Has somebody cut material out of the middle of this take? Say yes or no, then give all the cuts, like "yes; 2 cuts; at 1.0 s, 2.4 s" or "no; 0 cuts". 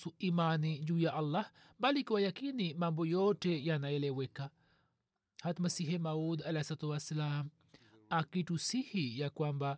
no; 0 cuts